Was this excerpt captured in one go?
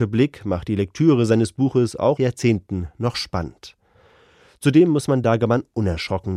no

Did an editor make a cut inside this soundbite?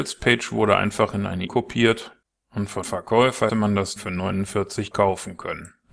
yes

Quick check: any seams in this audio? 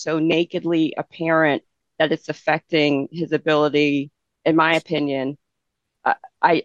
no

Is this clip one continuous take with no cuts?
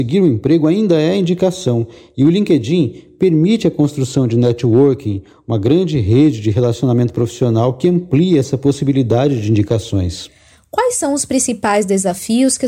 yes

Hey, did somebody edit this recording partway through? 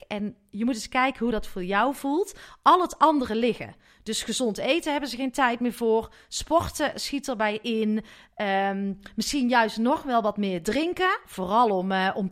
no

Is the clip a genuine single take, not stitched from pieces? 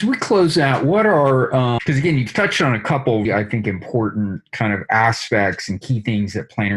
no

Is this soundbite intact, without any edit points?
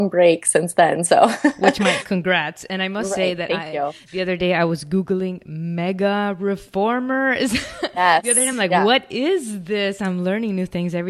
yes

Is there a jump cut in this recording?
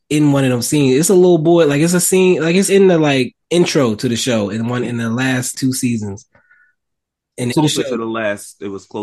yes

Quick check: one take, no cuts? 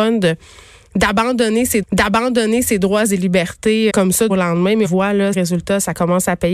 no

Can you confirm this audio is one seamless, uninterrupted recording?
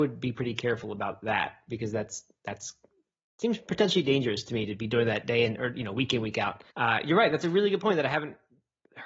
no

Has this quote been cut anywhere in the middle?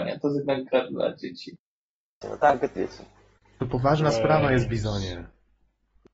yes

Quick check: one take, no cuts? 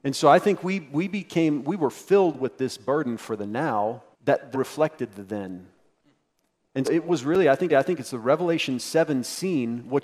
no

